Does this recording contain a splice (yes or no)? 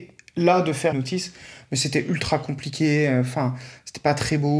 yes